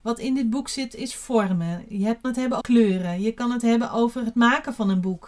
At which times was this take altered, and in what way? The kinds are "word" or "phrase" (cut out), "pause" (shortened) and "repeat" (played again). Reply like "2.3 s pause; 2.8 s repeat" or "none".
2.2 s word; 2.6 s word

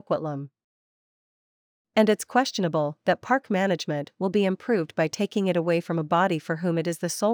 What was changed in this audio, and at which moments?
none

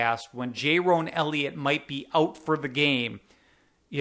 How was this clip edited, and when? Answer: none

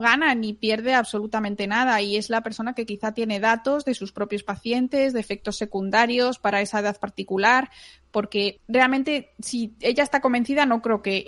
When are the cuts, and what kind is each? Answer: none

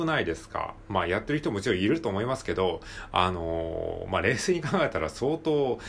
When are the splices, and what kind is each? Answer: none

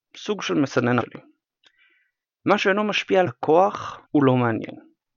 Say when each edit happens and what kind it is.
1.0 s word; 3.3 s word; 4.0 s pause

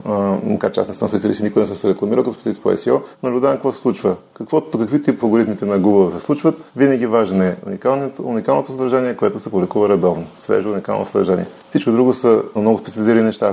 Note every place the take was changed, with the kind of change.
3.1 s pause; 5.2 s word; 6.7 s pause; 11.6 s pause; 12.5 s word

